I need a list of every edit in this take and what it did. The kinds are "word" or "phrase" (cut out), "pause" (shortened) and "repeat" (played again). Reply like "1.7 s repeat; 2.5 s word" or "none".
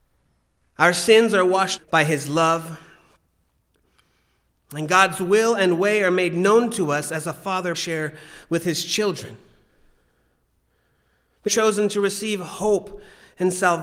1.8 s word; 7.7 s word; 11.5 s word